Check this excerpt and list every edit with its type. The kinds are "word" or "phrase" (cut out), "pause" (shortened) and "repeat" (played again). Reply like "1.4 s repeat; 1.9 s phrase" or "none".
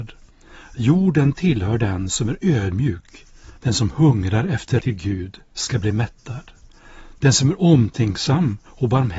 3.6 s pause; 4.8 s phrase